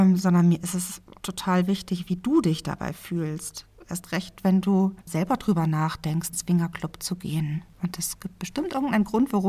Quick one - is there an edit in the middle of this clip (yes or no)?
yes